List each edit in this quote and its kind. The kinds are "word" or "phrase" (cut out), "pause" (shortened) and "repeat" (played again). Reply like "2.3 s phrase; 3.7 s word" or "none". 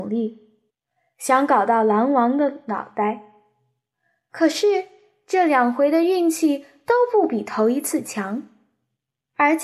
none